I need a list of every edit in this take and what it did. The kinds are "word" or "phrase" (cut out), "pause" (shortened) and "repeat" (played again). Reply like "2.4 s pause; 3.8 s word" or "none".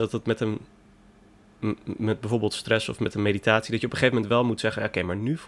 none